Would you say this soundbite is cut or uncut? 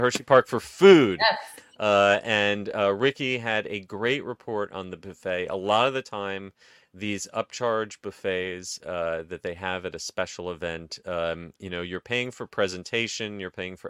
uncut